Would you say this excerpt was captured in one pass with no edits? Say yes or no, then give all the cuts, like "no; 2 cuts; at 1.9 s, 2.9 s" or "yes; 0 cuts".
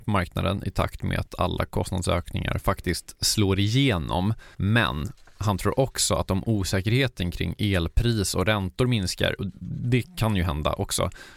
no; 1 cut; at 4.5 s